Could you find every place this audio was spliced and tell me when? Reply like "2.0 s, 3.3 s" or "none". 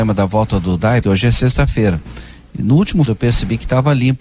1.0 s, 3.1 s